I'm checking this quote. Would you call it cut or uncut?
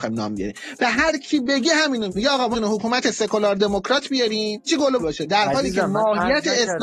cut